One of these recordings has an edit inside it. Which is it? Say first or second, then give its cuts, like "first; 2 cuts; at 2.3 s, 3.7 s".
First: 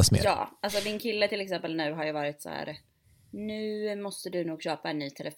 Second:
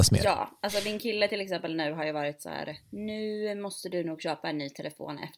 second; 1 cut; at 2.8 s